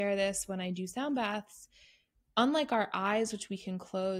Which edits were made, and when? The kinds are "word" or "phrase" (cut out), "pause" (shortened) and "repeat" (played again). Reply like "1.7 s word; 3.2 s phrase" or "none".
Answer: none